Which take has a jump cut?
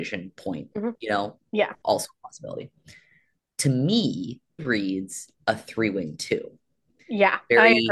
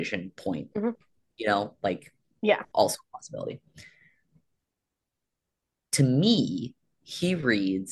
first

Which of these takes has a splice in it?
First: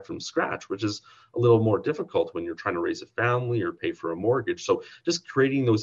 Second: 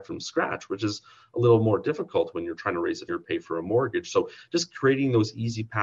second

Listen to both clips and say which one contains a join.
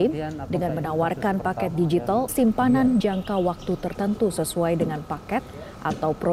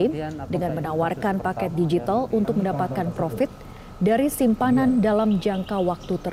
first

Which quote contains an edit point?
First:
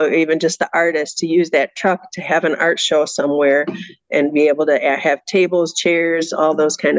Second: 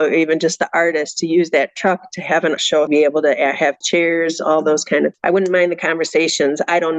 second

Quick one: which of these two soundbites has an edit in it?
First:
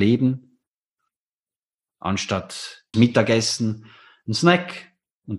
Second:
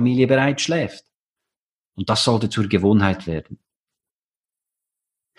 first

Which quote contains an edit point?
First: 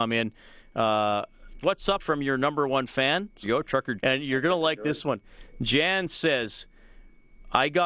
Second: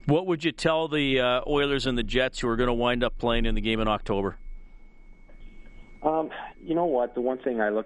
first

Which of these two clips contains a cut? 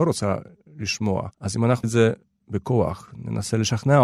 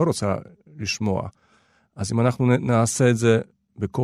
first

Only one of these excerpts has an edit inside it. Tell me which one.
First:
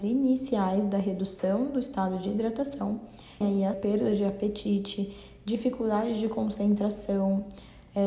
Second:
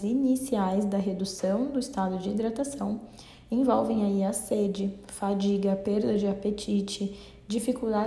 first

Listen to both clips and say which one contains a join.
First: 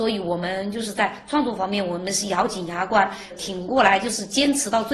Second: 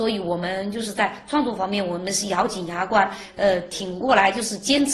first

